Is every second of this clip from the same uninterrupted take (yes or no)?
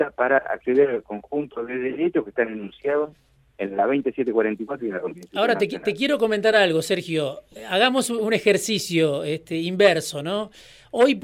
yes